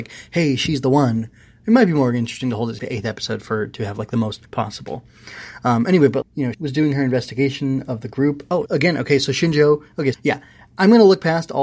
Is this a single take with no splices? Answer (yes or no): no